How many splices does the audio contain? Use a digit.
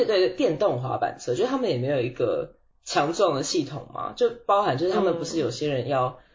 0